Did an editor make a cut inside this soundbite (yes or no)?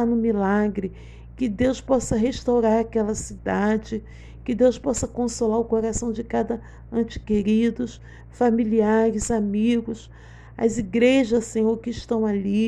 no